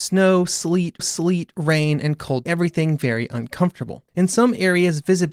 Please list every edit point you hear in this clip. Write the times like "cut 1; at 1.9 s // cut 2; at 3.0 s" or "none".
cut 1; at 1.0 s // cut 2; at 2.5 s // cut 3; at 4.1 s